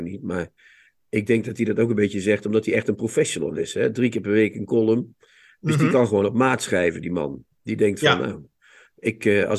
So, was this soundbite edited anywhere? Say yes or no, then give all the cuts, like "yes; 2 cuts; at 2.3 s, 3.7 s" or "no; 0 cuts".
no; 0 cuts